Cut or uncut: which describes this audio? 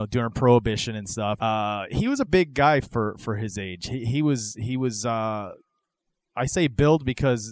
cut